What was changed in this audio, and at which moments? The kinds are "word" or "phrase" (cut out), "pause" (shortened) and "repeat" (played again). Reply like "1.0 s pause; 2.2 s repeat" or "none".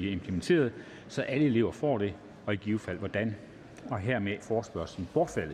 4.4 s word